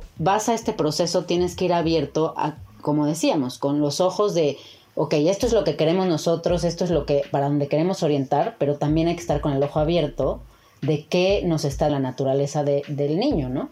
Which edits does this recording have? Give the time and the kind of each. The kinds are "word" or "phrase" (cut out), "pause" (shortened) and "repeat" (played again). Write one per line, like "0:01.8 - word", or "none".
0:11.9 - word